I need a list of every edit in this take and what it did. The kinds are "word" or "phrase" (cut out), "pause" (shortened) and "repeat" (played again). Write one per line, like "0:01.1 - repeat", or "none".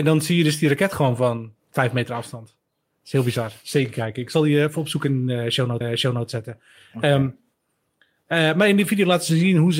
0:05.8 - repeat